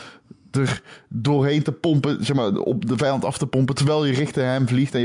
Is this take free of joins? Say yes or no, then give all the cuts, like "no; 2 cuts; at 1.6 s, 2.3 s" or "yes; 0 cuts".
yes; 0 cuts